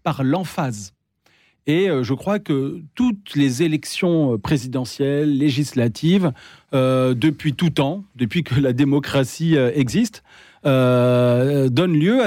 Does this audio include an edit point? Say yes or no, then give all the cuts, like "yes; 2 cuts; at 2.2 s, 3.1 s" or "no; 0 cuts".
no; 0 cuts